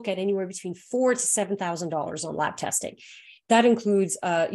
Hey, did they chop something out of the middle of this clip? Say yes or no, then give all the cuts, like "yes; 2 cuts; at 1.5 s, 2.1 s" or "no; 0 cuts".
no; 0 cuts